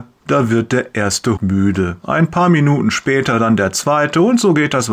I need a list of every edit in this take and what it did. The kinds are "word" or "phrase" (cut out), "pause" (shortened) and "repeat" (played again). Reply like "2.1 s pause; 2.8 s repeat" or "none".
1.4 s word